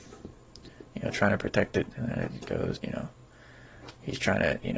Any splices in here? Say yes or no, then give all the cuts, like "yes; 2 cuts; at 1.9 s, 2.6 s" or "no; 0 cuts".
yes; 1 cut; at 2.8 s